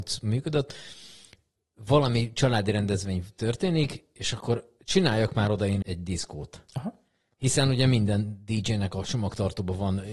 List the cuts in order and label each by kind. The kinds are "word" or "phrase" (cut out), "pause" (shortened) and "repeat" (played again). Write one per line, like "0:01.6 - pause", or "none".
0:05.8 - word

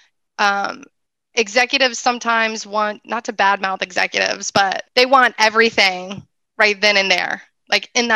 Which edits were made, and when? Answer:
0:03.0 - word
0:04.9 - pause

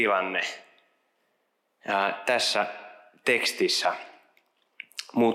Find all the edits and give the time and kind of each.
none

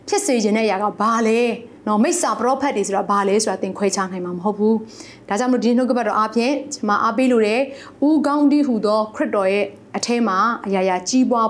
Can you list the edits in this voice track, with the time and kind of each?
0:01.8 - pause

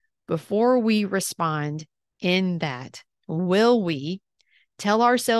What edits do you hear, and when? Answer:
none

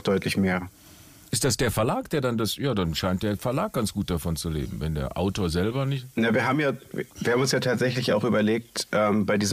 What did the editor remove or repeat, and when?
0:07.1 - pause

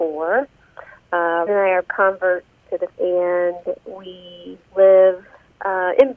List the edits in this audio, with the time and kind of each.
0:01.5 - word
0:01.8 - word
0:02.9 - word
0:04.7 - pause

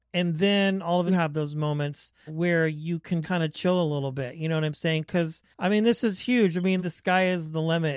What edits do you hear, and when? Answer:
0:01.1 - phrase
0:02.3 - word
0:03.2 - word
0:05.5 - pause
0:06.8 - word

